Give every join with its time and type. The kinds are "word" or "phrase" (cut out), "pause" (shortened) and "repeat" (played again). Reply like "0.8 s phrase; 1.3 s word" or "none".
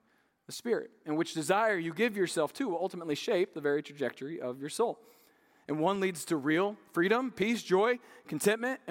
none